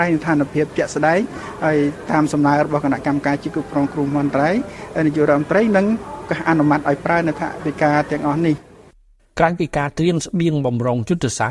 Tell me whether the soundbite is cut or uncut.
uncut